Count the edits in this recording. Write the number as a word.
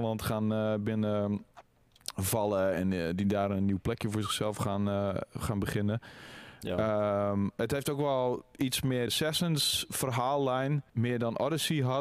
two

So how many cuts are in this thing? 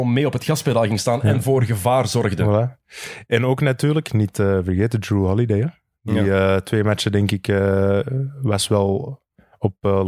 zero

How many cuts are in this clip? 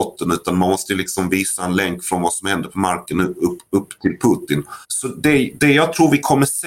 one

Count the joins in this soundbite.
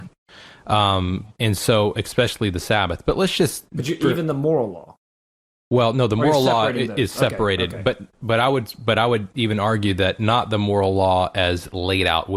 zero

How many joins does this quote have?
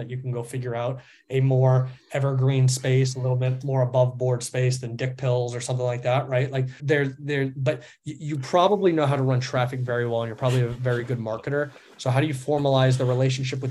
one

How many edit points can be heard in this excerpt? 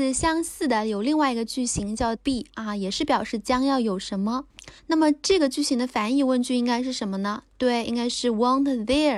two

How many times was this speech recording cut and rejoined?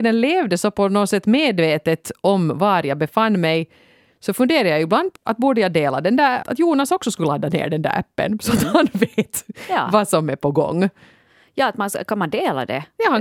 two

